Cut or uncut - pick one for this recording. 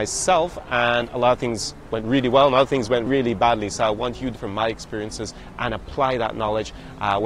cut